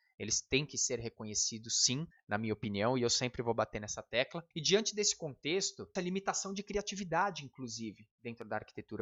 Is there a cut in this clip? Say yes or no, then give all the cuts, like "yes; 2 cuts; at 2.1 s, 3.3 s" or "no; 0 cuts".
yes; 3 cuts; at 2.1 s, 4.5 s, 6.0 s